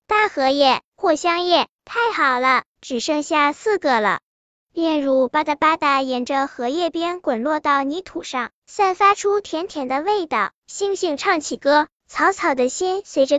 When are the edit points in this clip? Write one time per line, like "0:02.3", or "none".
none